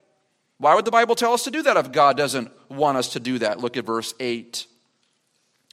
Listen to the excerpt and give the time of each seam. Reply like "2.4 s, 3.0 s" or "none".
none